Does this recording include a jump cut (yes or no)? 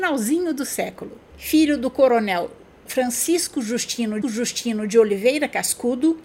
yes